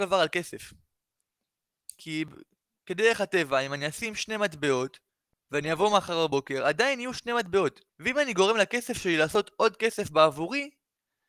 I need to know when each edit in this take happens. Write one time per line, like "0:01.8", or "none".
0:05.1
0:07.9